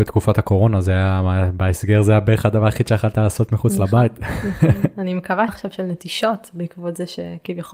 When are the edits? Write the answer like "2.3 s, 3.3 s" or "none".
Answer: 5.5 s